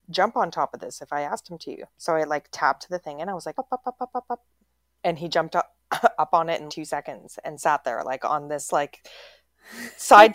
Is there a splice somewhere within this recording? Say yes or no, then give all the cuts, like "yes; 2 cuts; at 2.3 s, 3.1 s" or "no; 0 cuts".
yes; 3 cuts; at 1.9 s, 3.5 s, 6.7 s